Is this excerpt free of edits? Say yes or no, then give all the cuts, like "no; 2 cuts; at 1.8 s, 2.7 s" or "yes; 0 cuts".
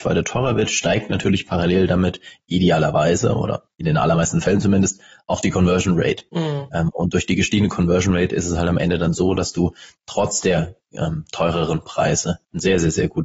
yes; 0 cuts